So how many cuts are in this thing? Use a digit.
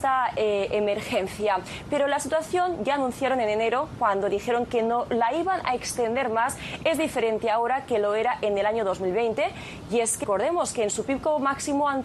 1